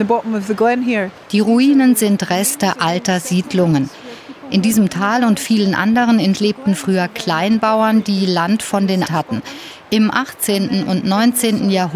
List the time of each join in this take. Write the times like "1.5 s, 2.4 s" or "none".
6.3 s, 9.0 s